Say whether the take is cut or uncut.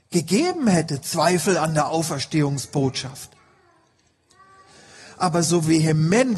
uncut